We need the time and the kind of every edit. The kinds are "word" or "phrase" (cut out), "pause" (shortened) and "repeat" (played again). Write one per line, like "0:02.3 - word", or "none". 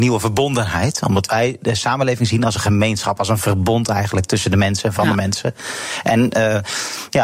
none